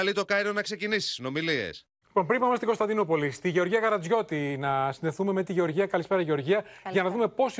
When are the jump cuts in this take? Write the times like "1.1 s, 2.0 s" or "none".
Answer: 2.0 s